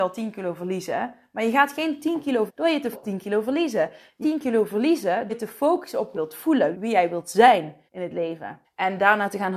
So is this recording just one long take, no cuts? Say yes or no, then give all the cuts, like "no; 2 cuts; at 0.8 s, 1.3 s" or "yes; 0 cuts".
no; 8 cuts; at 2.5 s, 2.9 s, 4.2 s, 5.3 s, 6.1 s, 6.7 s, 7.9 s, 8.6 s